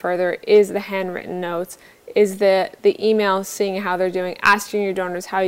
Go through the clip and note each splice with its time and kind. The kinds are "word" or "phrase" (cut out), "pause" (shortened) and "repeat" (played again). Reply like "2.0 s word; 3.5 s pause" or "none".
none